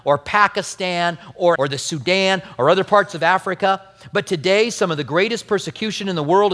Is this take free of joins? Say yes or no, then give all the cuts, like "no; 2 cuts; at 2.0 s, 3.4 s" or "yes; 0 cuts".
no; 1 cut; at 1.5 s